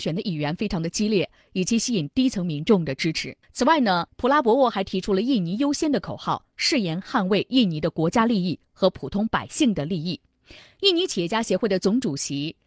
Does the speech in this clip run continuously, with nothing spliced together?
no; 2 cuts; at 3.4 s, 4.1 s

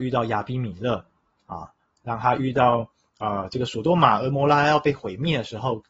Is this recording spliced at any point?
no; 0 cuts

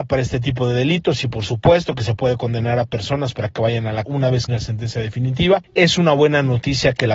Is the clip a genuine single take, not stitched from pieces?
no; 2 cuts; at 4.1 s, 4.5 s

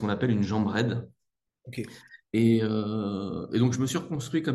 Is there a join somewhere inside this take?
no; 0 cuts

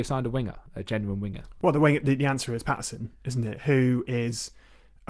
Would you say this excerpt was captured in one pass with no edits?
yes; 0 cuts

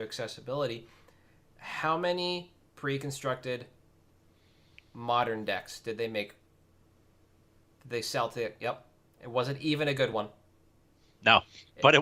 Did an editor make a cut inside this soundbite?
no; 0 cuts

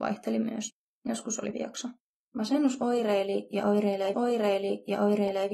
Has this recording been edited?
yes; 4 cuts; at 0.9 s, 1.5 s, 2.0 s, 4.1 s

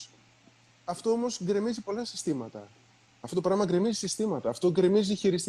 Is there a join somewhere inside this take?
no; 0 cuts

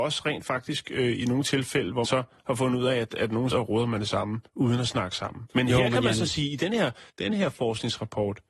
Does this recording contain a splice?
yes; 4 cuts; at 2.0 s, 3.5 s, 4.5 s, 7.1 s

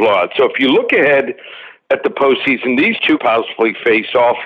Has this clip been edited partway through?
yes; 1 cut; at 3.2 s

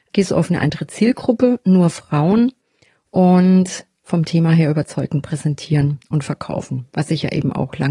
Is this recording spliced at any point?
yes; 1 cut; at 3.9 s

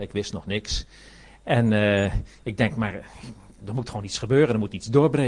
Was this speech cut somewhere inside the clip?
no; 0 cuts

